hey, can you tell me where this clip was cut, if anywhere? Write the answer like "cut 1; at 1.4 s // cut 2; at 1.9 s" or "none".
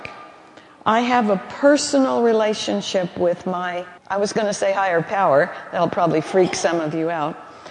cut 1; at 4.0 s